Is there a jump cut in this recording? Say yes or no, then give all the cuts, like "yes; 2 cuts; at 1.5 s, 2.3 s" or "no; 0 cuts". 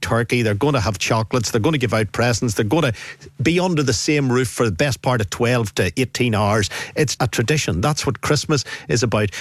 yes; 1 cut; at 7.2 s